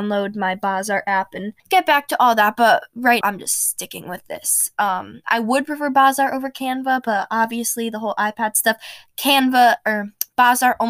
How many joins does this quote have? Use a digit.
2